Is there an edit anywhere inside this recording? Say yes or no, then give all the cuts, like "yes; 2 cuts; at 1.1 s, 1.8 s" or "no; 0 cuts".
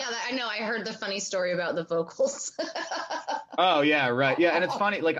no; 0 cuts